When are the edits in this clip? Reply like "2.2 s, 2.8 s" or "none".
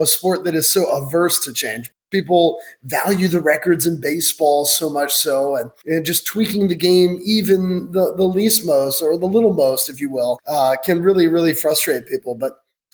none

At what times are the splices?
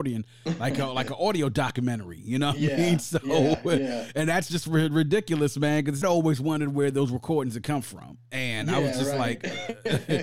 6.0 s

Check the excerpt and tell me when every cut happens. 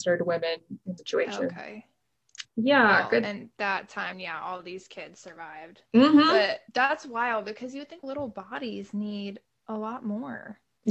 1.0 s, 4.1 s, 5.9 s, 6.7 s, 8.0 s

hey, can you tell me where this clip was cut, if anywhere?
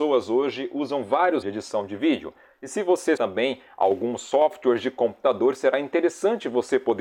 1.4 s, 3.2 s

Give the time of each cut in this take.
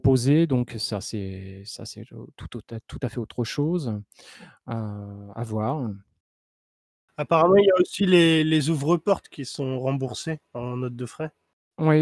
none

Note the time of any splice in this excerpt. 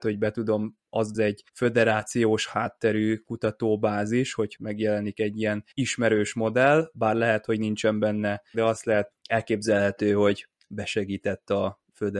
1.1 s, 1.5 s, 4.6 s, 5.7 s, 8.5 s, 9.1 s

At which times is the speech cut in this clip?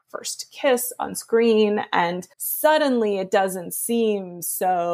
2.3 s

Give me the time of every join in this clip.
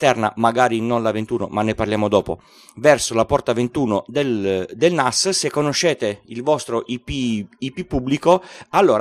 none

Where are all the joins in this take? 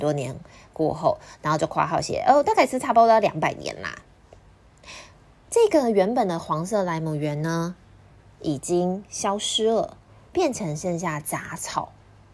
none

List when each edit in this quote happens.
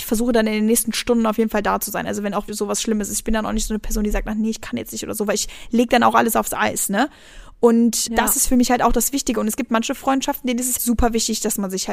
2.5 s, 8.1 s, 10.8 s

